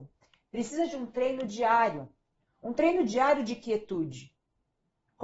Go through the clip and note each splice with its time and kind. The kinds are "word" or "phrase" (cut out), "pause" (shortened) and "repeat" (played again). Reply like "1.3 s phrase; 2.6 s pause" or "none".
none

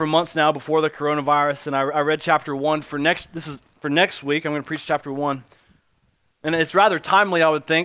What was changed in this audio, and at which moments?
none

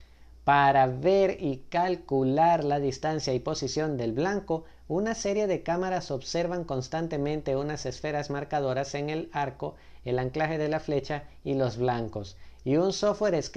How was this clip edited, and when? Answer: none

